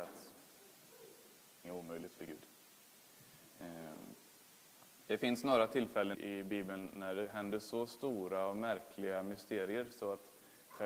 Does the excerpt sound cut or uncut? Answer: cut